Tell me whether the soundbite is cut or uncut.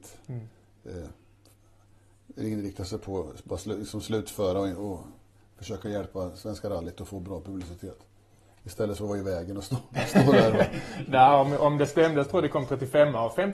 uncut